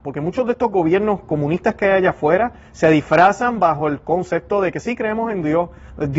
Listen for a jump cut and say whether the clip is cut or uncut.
uncut